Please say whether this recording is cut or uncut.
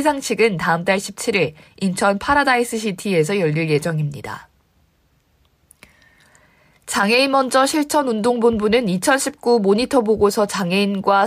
uncut